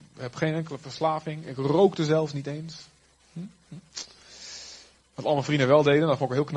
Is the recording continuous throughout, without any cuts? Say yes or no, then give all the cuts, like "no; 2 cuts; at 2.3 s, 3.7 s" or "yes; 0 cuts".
no; 1 cut; at 5.0 s